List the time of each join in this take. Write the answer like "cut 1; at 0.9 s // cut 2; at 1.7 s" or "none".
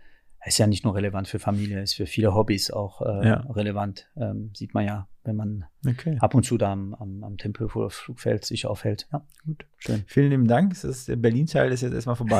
none